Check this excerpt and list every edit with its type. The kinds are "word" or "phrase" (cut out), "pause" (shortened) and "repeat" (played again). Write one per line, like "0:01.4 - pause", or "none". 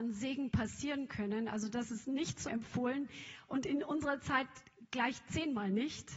0:02.5 - word